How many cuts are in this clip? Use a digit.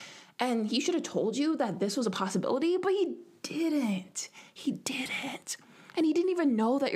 0